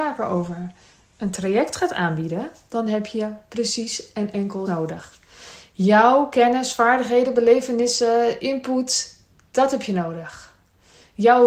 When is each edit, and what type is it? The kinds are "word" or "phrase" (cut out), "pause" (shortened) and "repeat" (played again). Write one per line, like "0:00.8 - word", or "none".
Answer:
0:04.7 - word